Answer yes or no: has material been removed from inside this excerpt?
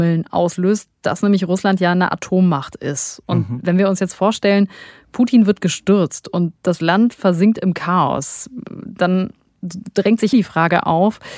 yes